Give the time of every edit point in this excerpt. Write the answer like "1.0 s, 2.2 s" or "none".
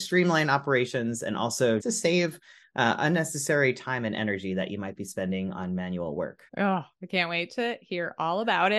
1.8 s, 6.5 s